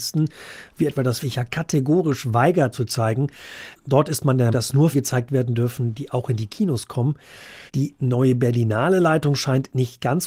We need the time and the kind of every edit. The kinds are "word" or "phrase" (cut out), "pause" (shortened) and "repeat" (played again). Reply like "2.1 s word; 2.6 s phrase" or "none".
1.2 s phrase; 2.7 s word; 4.5 s word; 4.9 s word; 7.7 s pause

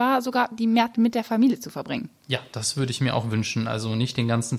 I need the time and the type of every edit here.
0.9 s word

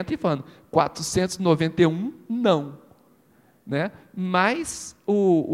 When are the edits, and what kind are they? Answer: none

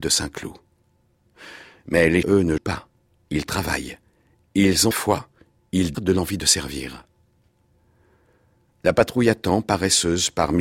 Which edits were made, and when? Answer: 2.2 s word; 2.6 s word; 4.9 s word; 5.9 s word

